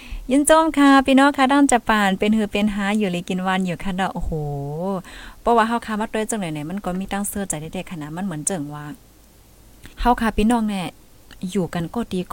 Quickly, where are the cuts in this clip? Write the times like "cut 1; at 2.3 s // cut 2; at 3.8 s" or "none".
cut 1; at 9.9 s